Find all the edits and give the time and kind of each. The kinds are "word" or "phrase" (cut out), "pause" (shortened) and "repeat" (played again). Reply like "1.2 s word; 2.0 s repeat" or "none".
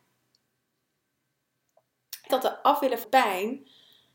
2.3 s word; 3.0 s word